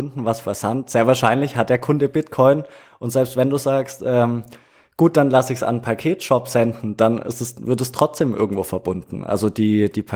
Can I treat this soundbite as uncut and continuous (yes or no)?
yes